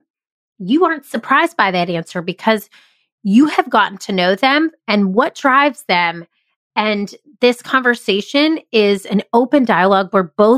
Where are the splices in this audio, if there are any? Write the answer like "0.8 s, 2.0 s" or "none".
none